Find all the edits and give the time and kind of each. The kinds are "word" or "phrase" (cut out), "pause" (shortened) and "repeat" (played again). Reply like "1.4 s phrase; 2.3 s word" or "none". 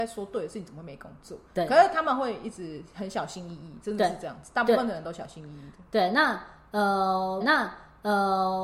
7.4 s repeat